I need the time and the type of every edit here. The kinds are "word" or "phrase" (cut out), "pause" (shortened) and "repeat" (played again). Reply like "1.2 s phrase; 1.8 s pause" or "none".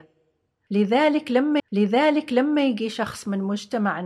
1.6 s repeat